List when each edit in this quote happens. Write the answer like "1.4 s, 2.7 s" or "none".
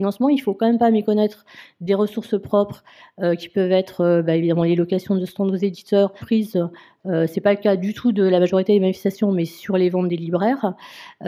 6.2 s

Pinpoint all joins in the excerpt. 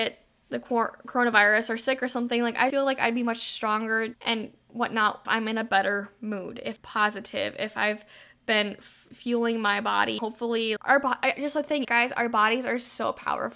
2.7 s, 4.1 s, 5.3 s, 6.8 s, 9.1 s, 10.2 s, 10.8 s, 11.8 s

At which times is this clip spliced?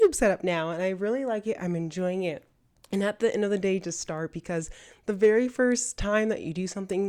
none

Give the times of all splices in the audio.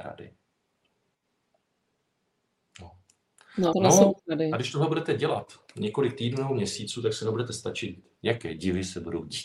3.7 s, 4.2 s, 8.2 s

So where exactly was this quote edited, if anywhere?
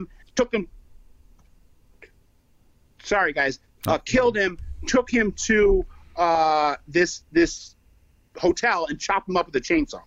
none

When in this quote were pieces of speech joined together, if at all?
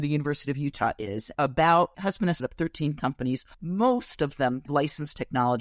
1.3 s, 1.9 s, 2.4 s, 3.5 s, 4.7 s

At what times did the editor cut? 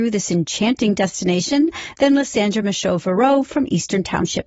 none

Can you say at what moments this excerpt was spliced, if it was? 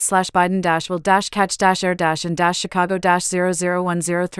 none

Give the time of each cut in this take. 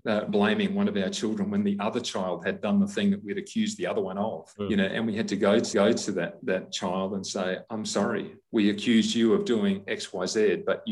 5.7 s

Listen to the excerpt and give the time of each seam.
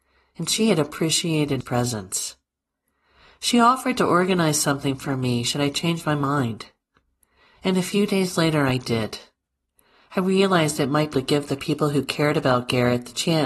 1.6 s, 11.1 s

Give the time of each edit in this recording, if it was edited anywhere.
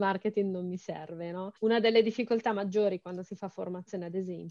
1.6 s

